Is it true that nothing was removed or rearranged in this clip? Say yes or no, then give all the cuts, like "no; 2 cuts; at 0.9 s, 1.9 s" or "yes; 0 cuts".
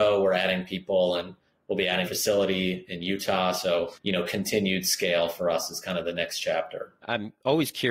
no; 1 cut; at 2.0 s